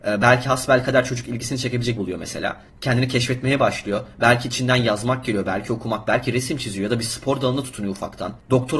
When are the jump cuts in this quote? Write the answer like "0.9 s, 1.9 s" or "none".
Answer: 2.0 s, 2.7 s